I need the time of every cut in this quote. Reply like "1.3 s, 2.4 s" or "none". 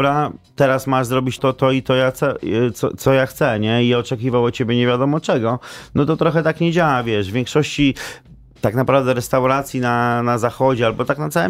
1.4 s